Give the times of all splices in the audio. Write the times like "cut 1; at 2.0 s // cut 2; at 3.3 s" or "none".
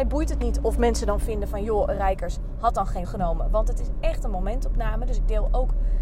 cut 1; at 3.0 s